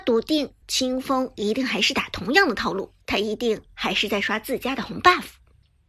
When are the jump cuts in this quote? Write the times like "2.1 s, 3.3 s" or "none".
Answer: 3.0 s